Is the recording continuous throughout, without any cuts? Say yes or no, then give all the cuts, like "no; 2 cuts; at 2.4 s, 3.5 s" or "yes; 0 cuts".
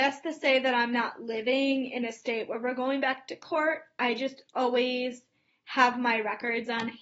yes; 0 cuts